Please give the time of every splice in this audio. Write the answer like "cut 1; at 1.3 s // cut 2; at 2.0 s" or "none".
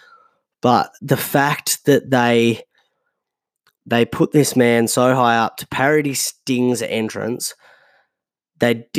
cut 1; at 1.0 s